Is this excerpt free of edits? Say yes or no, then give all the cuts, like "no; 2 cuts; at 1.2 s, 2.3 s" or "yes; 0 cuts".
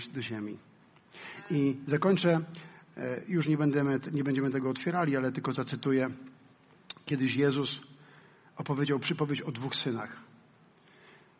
yes; 0 cuts